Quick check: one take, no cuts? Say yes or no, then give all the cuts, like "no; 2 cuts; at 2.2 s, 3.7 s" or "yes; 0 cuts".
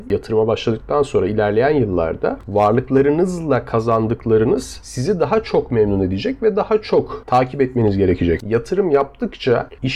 yes; 0 cuts